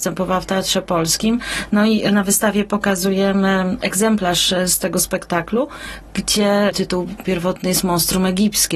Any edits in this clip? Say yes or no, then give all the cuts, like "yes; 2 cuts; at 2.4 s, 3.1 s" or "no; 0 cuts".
no; 0 cuts